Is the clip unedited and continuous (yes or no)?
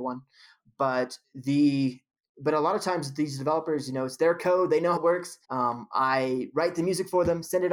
no